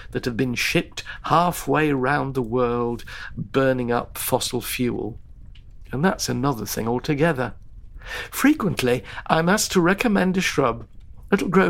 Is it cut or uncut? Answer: uncut